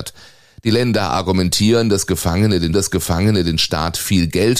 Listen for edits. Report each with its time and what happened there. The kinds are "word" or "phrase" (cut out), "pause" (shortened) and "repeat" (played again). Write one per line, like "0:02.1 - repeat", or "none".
0:02.7 - repeat

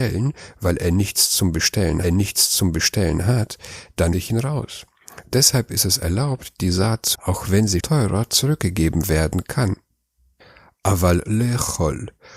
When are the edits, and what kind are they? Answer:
0:02.0 - repeat
0:04.1 - word
0:07.1 - word
0:07.8 - word
0:11.3 - word

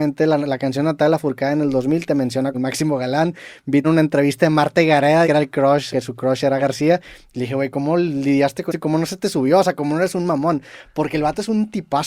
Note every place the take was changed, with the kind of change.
0:02.5 - word
0:03.8 - word
0:05.2 - word
0:05.9 - word
0:06.6 - word
0:07.7 - word
0:08.7 - word

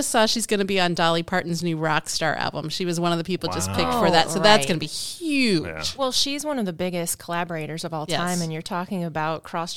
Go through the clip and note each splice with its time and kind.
none

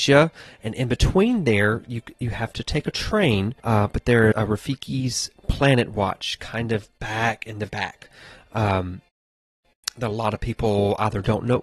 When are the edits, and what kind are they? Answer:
0:03.6 - pause
0:04.3 - word
0:07.7 - word

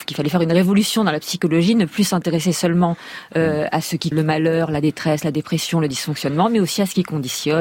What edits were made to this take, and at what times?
0:04.1 - word

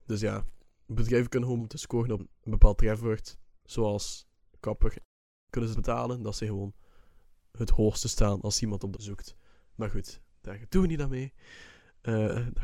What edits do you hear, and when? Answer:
0:01.6 - word
0:02.2 - word
0:05.7 - word
0:08.9 - word

